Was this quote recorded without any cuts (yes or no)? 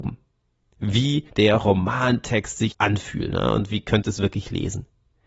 no